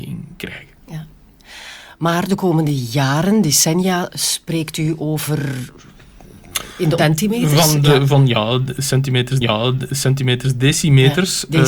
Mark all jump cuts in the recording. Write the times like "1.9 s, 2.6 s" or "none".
7.0 s, 9.4 s